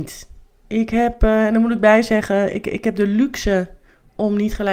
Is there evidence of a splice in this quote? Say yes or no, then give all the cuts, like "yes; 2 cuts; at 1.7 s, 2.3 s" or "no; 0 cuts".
no; 0 cuts